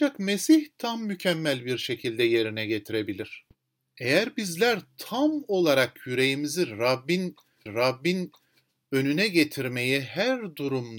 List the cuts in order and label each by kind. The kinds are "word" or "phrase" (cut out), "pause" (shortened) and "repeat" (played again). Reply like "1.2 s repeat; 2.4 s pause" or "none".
7.7 s repeat